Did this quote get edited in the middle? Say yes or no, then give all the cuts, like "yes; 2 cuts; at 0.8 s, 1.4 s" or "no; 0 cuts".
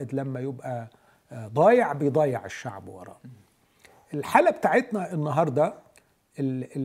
no; 0 cuts